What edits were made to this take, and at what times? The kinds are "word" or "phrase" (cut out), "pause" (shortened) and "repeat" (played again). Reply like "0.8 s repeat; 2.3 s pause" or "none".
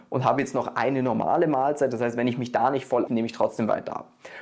3.1 s word